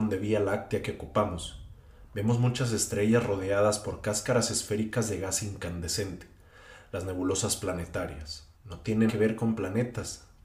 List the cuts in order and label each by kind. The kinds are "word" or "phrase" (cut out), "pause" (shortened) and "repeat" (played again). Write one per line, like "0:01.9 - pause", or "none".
0:08.5 - pause
0:09.1 - word